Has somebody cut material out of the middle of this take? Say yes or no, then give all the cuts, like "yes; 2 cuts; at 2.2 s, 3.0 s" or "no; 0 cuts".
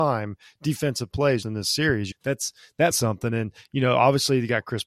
yes; 3 cuts; at 1.4 s, 2.1 s, 2.9 s